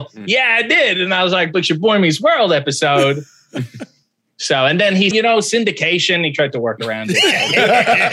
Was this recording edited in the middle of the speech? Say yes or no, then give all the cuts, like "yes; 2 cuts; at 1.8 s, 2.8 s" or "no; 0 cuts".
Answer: yes; 1 cut; at 5.1 s